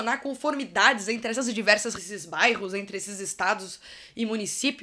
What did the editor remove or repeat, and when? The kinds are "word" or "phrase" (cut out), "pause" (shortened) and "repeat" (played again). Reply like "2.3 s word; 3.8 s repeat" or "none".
2.0 s phrase